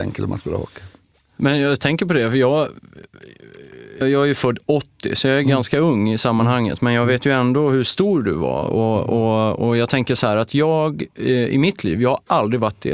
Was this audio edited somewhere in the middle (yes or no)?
yes